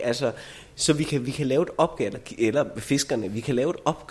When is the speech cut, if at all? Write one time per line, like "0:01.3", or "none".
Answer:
none